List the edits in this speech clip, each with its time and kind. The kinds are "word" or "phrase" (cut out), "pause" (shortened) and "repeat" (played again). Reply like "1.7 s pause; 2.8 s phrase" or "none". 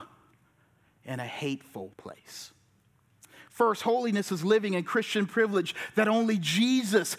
1.9 s pause